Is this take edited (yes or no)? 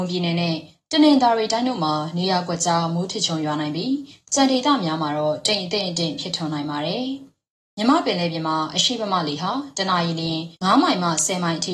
yes